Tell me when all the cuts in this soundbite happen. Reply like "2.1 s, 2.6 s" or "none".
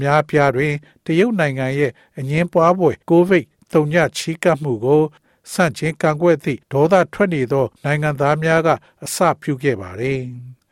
3.0 s, 6.6 s, 7.7 s